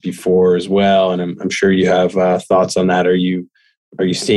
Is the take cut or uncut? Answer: uncut